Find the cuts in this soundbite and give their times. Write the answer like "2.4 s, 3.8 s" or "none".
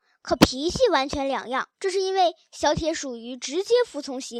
1.7 s